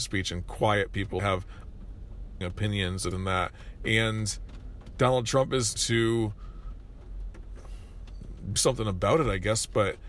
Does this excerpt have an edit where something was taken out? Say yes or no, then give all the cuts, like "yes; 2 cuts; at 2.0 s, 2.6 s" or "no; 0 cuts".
yes; 5 cuts; at 1.2 s, 2.4 s, 3.1 s, 5.8 s, 8.6 s